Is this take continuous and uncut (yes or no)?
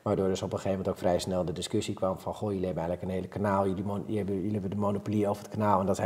yes